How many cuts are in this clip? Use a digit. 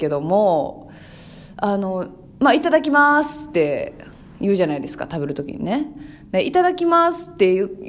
0